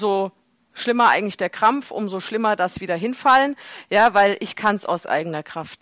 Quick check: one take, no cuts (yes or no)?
yes